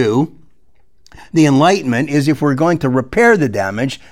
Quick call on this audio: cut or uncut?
uncut